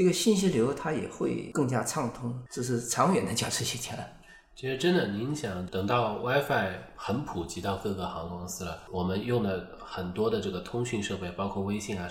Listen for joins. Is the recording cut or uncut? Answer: uncut